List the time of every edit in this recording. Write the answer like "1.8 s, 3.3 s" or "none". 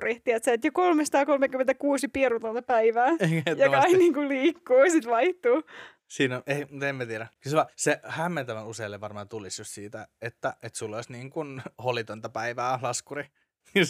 7.3 s, 7.7 s, 11.7 s